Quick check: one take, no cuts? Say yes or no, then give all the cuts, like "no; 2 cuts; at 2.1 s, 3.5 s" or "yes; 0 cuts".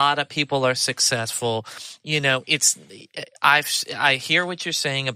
yes; 0 cuts